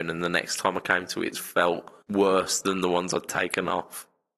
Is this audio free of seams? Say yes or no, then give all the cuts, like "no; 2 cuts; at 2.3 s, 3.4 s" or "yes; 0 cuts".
no; 2 cuts; at 1.3 s, 2.0 s